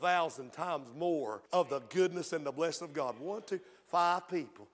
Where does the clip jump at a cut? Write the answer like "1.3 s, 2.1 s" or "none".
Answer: 1.5 s